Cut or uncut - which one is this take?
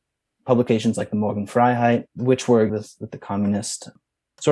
cut